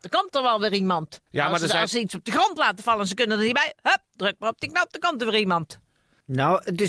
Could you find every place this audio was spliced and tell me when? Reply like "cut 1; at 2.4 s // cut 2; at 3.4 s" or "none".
none